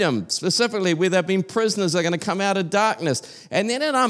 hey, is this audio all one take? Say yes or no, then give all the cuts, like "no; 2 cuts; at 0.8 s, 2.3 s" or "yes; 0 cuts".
yes; 0 cuts